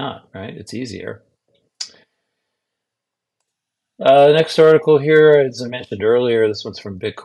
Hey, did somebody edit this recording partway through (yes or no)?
no